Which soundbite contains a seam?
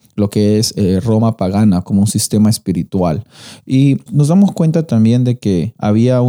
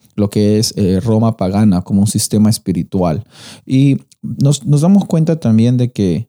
first; 1 cut; at 4.1 s

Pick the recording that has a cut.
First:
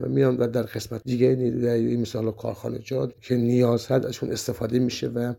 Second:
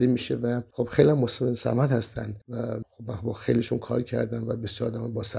first; 2 cuts; at 1.0 s, 3.1 s

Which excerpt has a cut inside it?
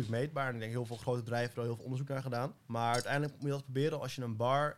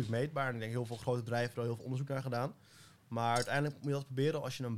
first; 1 cut; at 2.6 s

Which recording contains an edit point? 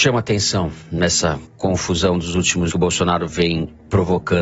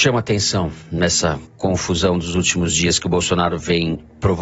first; 1 cut; at 2.7 s

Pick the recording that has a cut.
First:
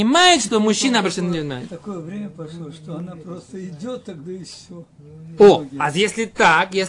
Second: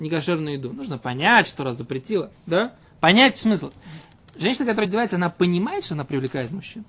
second; 1 cut; at 4.8 s

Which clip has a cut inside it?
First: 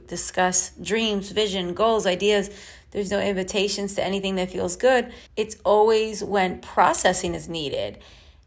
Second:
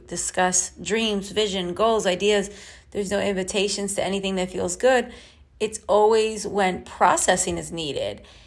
first; 1 cut; at 5.3 s

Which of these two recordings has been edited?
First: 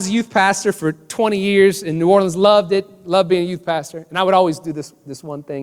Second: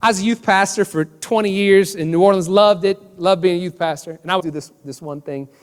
second; 1 cut; at 4.4 s

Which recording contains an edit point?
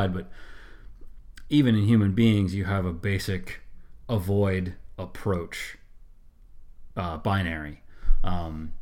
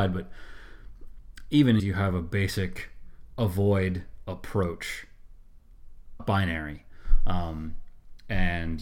second; 2 cuts; at 1.8 s, 6.2 s

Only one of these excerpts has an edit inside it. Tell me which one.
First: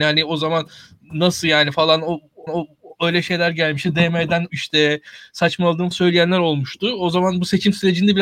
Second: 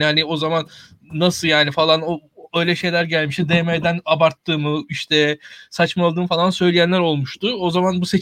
first; 3 cuts; at 2.5 s, 4.5 s, 5.9 s

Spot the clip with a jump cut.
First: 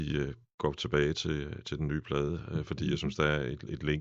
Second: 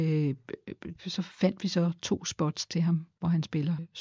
second; 2 cuts; at 1.0 s, 1.3 s

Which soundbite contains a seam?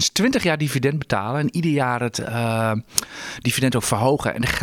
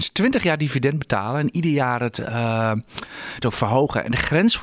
second; 1 cut; at 3.4 s

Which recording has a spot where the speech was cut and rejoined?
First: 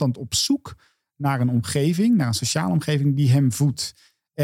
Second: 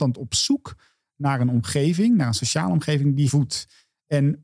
second; 1 cut; at 3.3 s

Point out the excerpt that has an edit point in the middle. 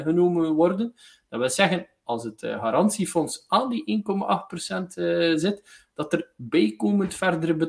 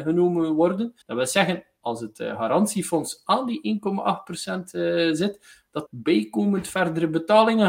second; 2 cuts; at 1.0 s, 5.9 s

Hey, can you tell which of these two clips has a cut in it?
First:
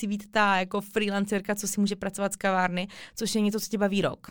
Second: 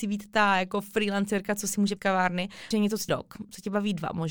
second; 3 cuts; at 2.0 s, 2.7 s, 3.1 s

